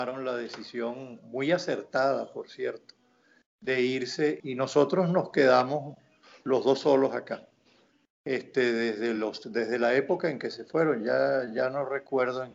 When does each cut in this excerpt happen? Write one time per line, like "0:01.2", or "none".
none